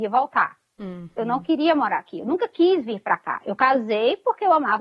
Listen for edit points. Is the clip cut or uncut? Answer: uncut